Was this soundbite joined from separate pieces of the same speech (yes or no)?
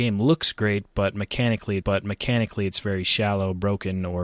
yes